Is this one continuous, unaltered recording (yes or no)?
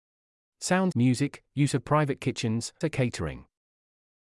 no